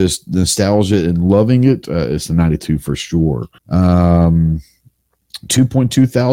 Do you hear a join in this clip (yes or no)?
yes